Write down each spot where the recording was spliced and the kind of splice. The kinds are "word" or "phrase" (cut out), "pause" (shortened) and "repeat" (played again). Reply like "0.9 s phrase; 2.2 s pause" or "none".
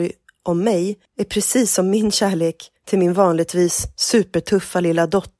1.1 s pause; 2.8 s pause